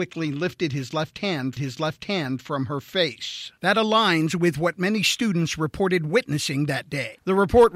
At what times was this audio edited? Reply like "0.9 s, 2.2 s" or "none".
1.6 s, 3.6 s